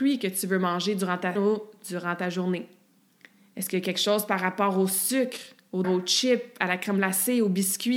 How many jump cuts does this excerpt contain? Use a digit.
3